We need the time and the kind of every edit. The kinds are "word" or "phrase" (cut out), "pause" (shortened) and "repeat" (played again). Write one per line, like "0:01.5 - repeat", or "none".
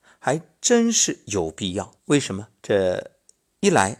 0:02.0 - pause
0:02.6 - pause